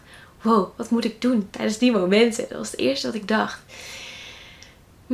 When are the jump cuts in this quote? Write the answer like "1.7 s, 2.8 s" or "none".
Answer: none